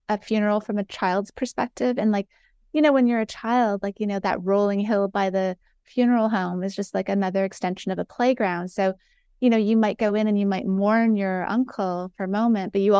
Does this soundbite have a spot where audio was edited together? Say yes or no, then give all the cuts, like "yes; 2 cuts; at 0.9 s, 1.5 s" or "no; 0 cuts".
no; 0 cuts